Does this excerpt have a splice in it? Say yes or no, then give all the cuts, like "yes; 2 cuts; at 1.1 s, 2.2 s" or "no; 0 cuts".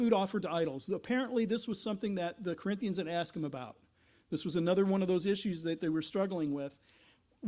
no; 0 cuts